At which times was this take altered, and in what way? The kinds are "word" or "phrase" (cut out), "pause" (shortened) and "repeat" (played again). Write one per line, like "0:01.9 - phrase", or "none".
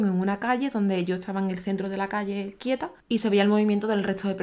0:03.0 - pause